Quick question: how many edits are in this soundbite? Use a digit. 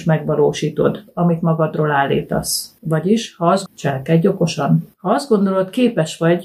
3